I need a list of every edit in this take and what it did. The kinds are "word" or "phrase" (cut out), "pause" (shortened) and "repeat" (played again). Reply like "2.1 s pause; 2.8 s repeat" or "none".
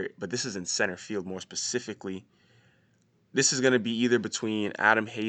none